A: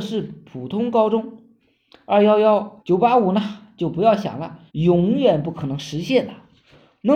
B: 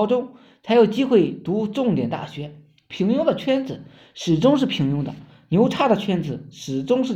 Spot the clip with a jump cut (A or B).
A